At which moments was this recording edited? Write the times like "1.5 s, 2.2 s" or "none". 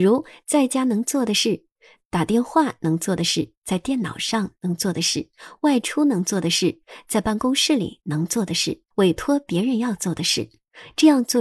8.9 s